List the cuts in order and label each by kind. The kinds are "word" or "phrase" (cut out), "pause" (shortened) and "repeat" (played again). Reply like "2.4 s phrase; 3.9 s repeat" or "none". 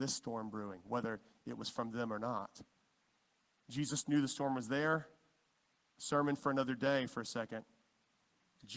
none